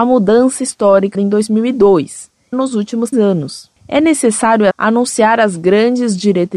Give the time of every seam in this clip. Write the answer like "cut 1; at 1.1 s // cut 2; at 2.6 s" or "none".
cut 1; at 1.1 s // cut 2; at 2.5 s // cut 3; at 3.1 s // cut 4; at 4.7 s